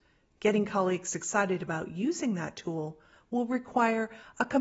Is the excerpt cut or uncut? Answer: uncut